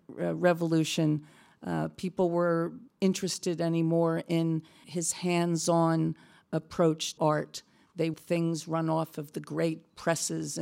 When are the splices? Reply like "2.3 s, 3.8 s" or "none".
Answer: 2.9 s, 4.8 s, 7.2 s, 8.1 s